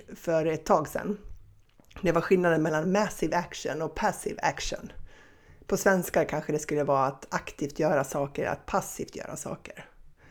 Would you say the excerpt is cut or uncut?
uncut